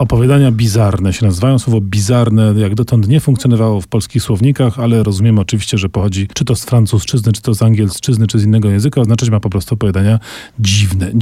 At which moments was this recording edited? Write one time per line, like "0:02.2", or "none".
none